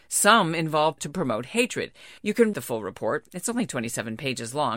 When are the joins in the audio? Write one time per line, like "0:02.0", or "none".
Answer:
0:01.0
0:02.2
0:02.5